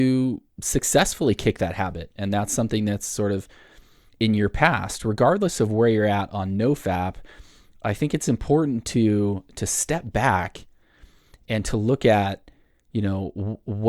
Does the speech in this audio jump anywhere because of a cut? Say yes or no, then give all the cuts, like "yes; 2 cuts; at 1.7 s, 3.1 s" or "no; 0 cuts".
no; 0 cuts